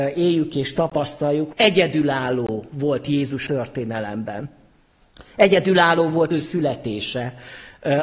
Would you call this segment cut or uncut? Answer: cut